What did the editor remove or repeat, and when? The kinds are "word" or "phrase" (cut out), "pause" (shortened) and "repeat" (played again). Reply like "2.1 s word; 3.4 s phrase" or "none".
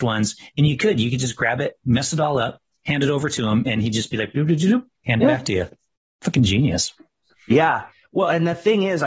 none